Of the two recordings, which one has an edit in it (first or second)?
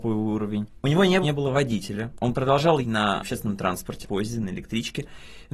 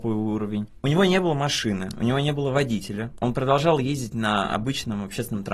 first